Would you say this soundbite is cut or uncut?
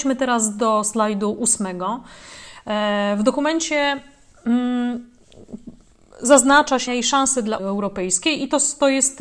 cut